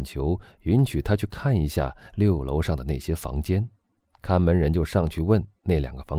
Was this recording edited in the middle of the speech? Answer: yes; 1 cut; at 4.0 s

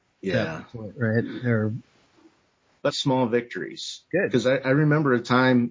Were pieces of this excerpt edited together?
yes; 1 cut; at 2.9 s

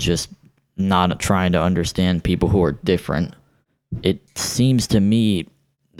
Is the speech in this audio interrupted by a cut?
no; 0 cuts

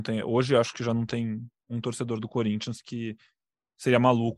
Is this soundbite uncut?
yes; 0 cuts

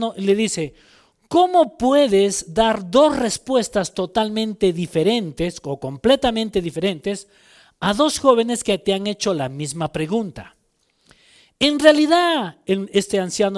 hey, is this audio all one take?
yes; 0 cuts

